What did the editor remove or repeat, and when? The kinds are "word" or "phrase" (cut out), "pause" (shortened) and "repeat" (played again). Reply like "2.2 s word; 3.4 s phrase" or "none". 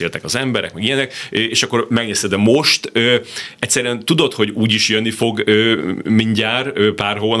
none